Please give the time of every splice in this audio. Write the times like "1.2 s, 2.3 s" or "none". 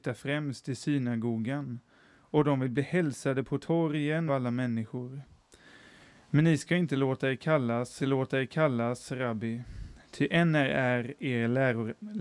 4.3 s, 8.0 s